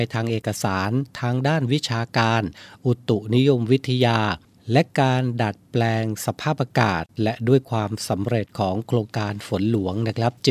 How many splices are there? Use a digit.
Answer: 0